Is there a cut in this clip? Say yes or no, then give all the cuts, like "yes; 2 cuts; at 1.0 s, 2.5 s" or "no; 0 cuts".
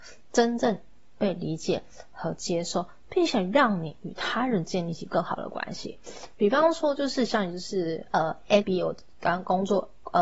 yes; 1 cut; at 8.6 s